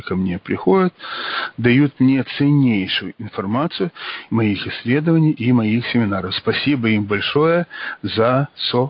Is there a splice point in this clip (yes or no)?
yes